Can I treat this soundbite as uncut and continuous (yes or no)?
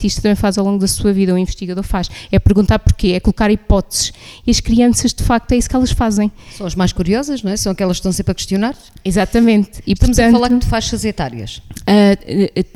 yes